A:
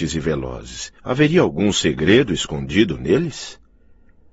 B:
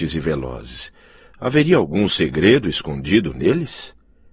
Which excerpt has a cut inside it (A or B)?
A